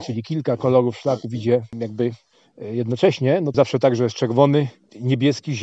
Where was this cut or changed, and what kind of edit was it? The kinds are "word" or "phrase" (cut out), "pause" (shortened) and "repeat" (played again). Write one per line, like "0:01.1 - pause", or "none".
0:03.5 - word